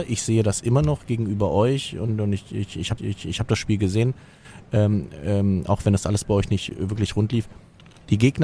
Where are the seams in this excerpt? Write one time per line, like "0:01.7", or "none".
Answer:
0:03.0